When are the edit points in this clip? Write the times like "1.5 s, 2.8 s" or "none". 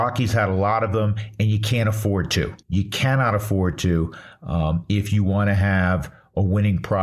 2.6 s